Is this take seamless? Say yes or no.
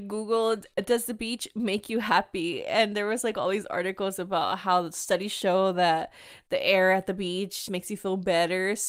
no